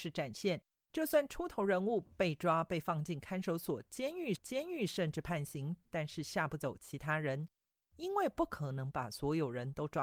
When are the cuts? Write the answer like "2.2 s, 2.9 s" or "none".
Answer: 4.4 s